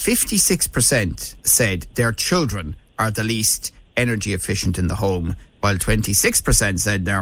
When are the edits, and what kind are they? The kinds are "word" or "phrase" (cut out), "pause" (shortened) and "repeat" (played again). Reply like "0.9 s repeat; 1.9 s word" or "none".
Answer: 1.4 s pause

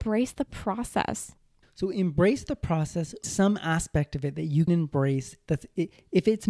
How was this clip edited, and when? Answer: 1.6 s pause; 3.2 s phrase; 4.7 s word

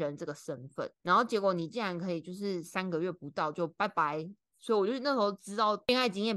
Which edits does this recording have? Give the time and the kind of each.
0.9 s pause

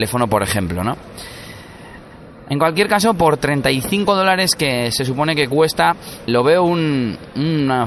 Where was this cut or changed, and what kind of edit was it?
6.3 s word

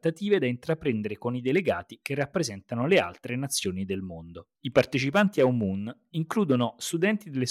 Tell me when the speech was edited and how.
4.6 s pause

